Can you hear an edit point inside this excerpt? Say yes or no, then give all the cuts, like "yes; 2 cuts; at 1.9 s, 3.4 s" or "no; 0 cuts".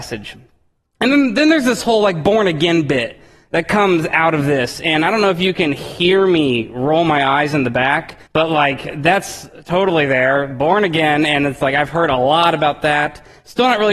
yes; 1 cut; at 8.3 s